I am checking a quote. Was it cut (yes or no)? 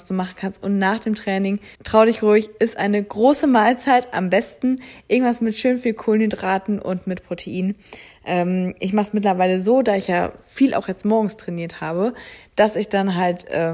yes